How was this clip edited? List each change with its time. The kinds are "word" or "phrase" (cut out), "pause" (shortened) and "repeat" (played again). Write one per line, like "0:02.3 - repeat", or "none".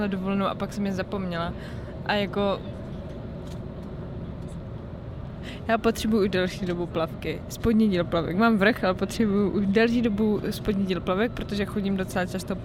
none